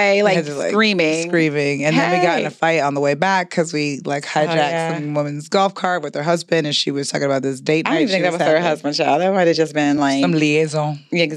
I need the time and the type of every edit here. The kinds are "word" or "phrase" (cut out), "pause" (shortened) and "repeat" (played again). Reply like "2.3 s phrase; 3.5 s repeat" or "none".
none

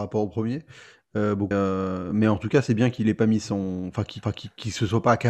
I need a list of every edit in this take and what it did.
1.5 s phrase; 4.2 s repeat

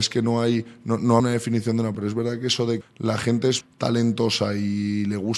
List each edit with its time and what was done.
1.2 s word; 1.9 s word; 2.8 s word; 3.6 s word

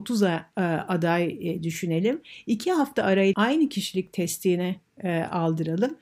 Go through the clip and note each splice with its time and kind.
3.3 s word

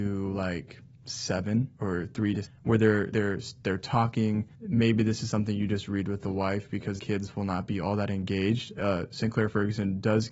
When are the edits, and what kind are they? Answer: 1.8 s pause; 2.4 s word; 3.1 s phrase; 4.5 s pause; 7.0 s word

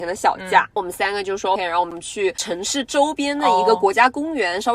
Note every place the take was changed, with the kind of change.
1.6 s word

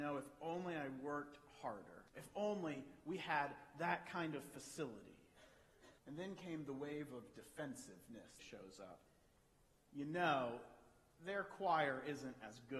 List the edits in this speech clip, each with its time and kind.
2.1 s pause; 6.0 s pause; 8.4 s phrase

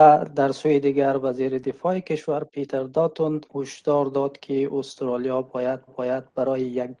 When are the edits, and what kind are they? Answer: 3.5 s pause; 5.9 s repeat

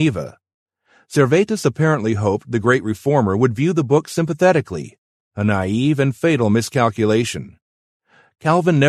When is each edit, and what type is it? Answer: none

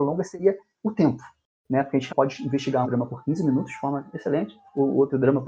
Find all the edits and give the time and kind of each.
2.1 s word; 2.8 s word

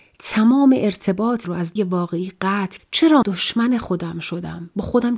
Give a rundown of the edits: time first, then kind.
1.4 s word; 1.8 s word; 2.8 s word; 3.2 s word

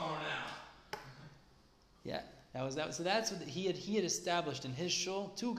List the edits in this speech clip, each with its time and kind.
none

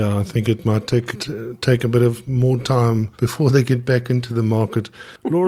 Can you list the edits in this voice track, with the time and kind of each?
1.1 s word; 3.1 s pause

